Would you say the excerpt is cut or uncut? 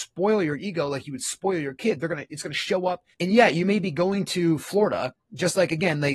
cut